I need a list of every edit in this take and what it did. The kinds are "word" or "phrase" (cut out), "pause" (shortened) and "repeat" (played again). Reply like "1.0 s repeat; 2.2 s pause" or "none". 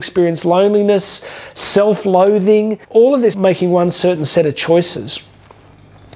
2.8 s pause; 3.3 s phrase